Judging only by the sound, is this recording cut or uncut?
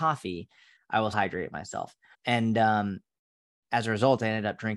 cut